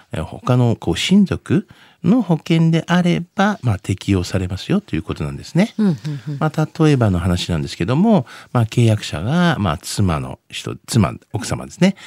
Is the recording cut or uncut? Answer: uncut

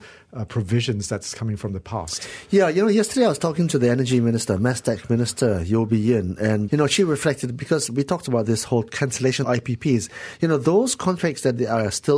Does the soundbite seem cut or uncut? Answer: cut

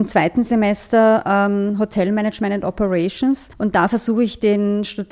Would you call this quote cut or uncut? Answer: cut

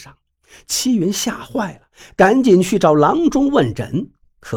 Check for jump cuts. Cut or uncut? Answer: uncut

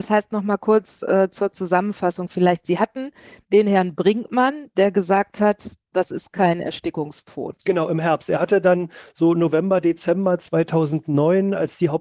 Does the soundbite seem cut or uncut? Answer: uncut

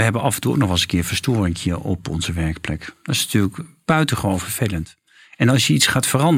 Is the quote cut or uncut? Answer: uncut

